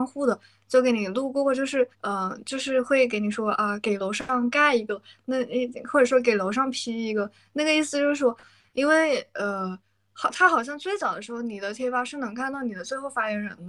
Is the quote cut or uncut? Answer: cut